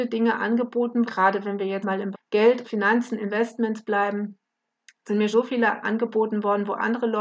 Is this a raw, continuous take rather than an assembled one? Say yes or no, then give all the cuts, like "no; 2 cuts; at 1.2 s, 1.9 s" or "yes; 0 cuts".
no; 6 cuts; at 1.1 s, 1.8 s, 2.1 s, 2.6 s, 5.3 s, 5.8 s